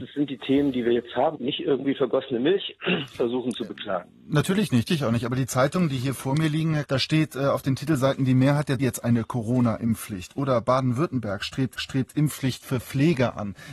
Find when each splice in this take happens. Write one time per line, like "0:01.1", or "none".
0:01.4
0:04.9
0:06.9
0:08.8
0:11.8